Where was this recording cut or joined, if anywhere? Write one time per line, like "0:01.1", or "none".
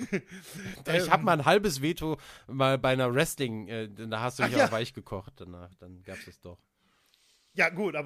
none